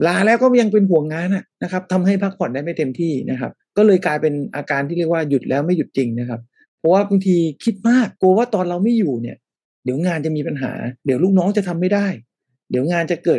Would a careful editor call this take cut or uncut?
cut